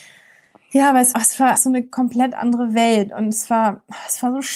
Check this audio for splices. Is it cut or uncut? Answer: cut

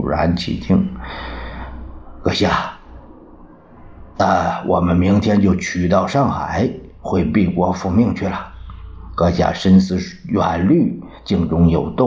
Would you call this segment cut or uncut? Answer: uncut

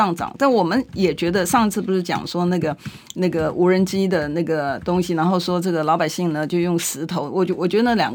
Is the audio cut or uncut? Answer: uncut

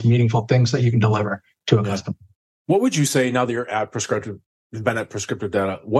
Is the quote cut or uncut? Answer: uncut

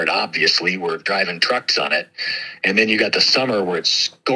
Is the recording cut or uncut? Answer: uncut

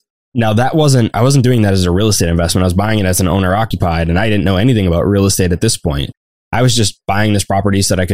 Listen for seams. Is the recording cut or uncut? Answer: uncut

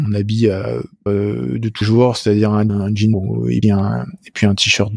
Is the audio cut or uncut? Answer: cut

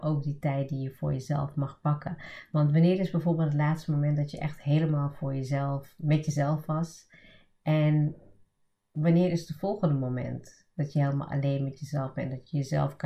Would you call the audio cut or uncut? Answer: uncut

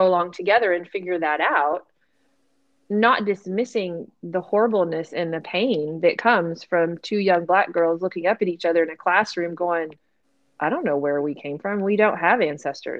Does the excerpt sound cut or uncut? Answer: uncut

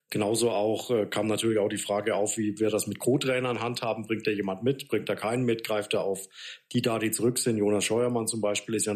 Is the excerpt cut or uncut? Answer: uncut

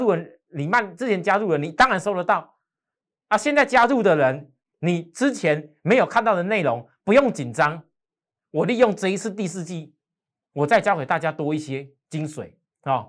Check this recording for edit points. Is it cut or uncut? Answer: uncut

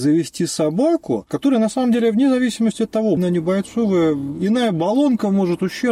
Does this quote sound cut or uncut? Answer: cut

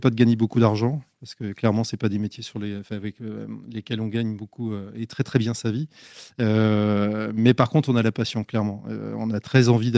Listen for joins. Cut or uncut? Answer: uncut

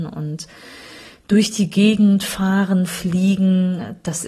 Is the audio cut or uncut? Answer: uncut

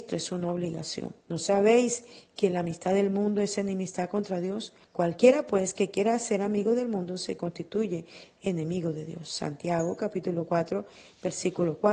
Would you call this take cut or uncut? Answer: cut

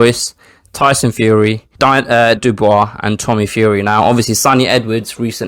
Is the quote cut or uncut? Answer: cut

